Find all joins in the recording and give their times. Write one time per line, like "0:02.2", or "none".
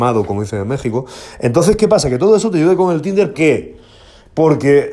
0:03.3